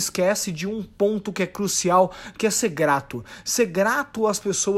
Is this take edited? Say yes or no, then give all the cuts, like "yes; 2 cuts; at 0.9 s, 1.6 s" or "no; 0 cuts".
no; 0 cuts